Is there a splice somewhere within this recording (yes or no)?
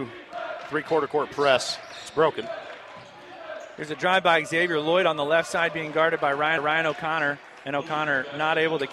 yes